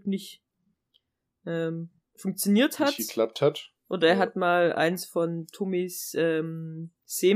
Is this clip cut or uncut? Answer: uncut